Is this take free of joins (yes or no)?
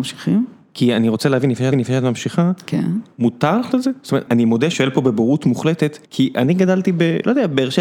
no